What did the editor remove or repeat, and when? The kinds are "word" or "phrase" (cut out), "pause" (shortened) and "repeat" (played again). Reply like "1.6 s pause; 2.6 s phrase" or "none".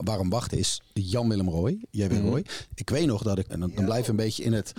3.5 s word